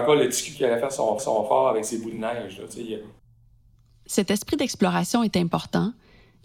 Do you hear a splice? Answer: yes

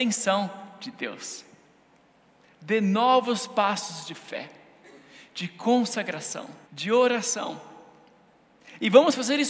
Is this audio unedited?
no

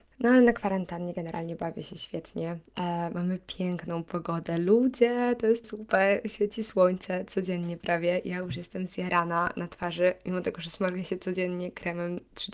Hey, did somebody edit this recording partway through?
yes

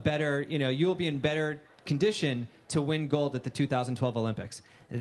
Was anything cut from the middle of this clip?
no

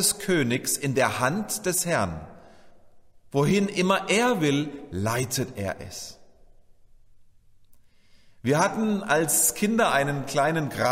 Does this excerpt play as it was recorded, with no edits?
yes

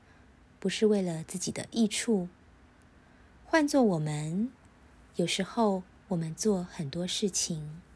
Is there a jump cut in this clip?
no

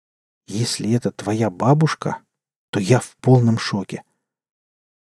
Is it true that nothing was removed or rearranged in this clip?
yes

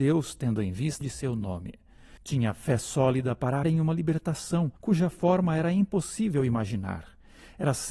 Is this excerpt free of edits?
no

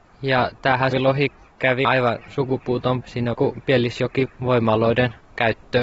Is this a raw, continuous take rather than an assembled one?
no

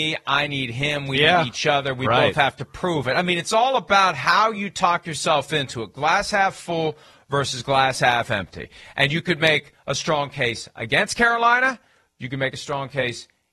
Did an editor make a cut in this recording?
no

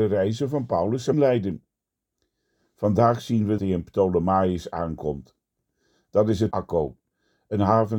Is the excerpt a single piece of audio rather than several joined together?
no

